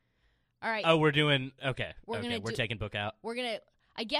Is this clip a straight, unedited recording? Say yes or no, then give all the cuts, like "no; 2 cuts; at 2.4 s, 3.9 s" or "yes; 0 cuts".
yes; 0 cuts